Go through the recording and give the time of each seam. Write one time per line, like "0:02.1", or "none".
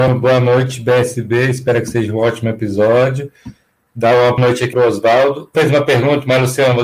0:04.4
0:04.7
0:05.5